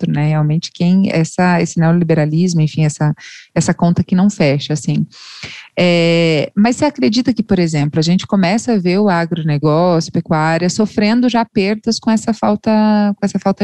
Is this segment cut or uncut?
cut